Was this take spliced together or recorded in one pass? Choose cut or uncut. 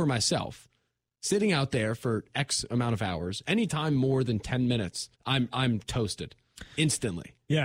cut